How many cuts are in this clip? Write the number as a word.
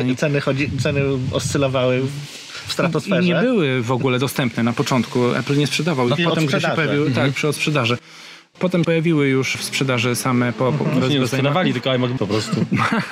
three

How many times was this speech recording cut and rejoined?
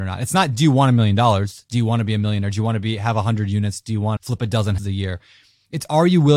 two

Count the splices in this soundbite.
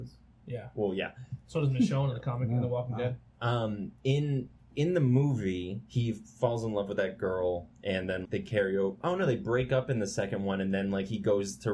three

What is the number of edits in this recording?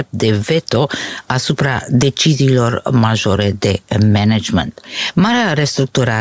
zero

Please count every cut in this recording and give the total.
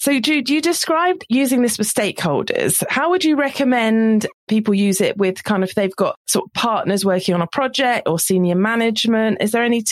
two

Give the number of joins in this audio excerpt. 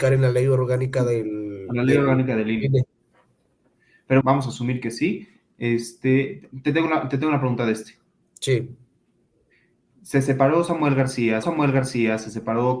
three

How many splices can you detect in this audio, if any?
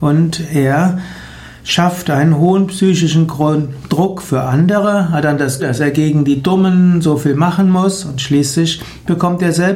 one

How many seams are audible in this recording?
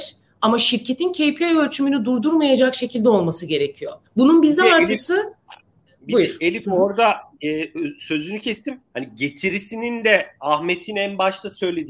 two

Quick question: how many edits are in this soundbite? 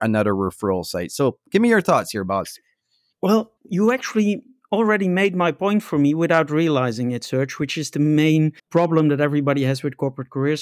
two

